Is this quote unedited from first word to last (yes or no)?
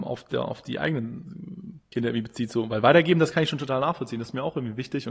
yes